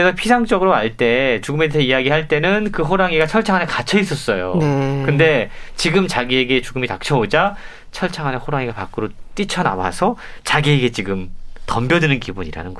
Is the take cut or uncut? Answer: uncut